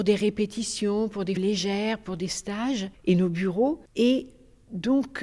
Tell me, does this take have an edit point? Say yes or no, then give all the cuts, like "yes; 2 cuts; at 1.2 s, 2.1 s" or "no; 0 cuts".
yes; 3 cuts; at 1.4 s, 2.9 s, 3.9 s